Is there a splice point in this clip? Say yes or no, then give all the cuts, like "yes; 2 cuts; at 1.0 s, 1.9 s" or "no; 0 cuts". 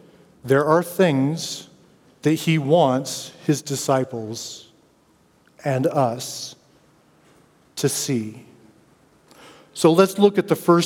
no; 0 cuts